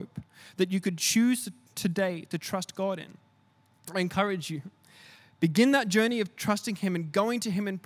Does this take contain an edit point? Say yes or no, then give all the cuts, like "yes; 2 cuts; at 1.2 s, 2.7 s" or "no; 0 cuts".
no; 0 cuts